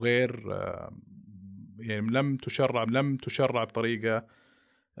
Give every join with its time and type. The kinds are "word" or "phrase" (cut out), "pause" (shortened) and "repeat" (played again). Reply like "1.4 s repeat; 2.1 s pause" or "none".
2.8 s repeat